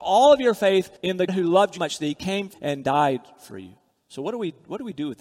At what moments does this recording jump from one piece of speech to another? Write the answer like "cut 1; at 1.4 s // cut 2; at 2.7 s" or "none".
cut 1; at 1.0 s // cut 2; at 1.3 s // cut 3; at 1.8 s // cut 4; at 2.5 s // cut 5; at 3.9 s